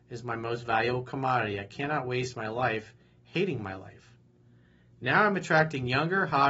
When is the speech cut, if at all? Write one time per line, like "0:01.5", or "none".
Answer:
none